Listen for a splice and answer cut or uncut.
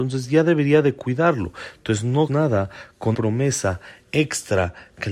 cut